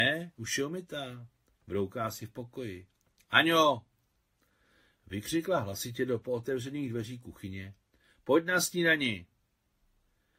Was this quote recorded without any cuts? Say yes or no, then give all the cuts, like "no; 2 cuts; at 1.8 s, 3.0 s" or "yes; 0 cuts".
yes; 0 cuts